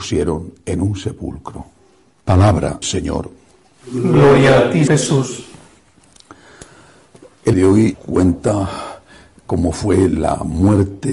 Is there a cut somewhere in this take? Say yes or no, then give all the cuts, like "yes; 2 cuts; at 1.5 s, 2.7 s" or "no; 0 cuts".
yes; 4 cuts; at 2.8 s, 4.9 s, 7.5 s, 7.9 s